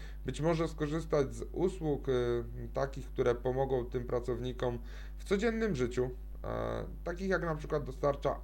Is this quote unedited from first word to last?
yes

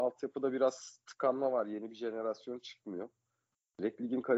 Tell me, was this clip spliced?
no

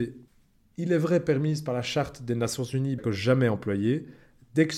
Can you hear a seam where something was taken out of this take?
yes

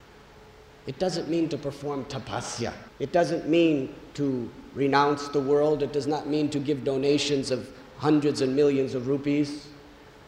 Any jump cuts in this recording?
yes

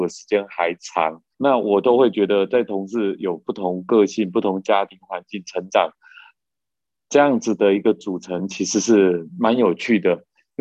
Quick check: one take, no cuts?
no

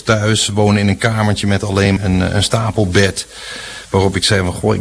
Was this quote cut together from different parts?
yes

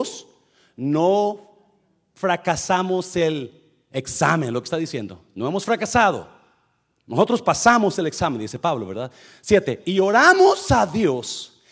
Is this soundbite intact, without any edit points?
yes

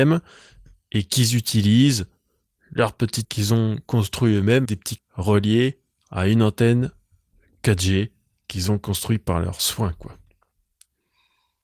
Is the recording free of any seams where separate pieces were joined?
no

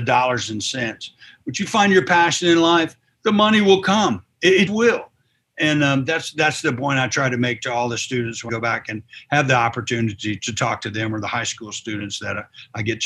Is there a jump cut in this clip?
yes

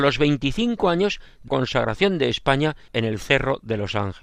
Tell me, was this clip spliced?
yes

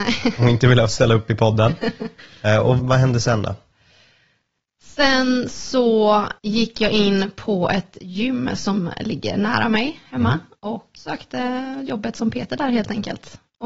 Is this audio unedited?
no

